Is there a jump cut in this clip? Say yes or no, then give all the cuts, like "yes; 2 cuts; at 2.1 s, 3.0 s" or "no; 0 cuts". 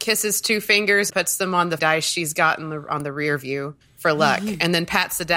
yes; 3 cuts; at 1.1 s, 1.8 s, 3.8 s